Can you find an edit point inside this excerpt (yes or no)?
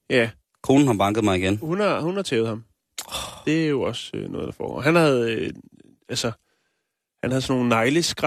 no